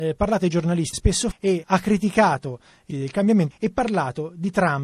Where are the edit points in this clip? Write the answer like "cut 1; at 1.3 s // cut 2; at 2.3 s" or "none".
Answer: cut 1; at 0.9 s // cut 2; at 1.3 s // cut 3; at 1.6 s // cut 4; at 2.9 s // cut 5; at 3.5 s